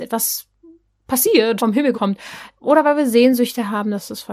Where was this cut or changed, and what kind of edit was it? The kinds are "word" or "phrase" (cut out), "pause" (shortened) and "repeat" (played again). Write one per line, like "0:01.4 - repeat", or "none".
0:01.6 - word
0:01.9 - word